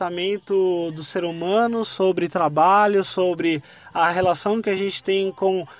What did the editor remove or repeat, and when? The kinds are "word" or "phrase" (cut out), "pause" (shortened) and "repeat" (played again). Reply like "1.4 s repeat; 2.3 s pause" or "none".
none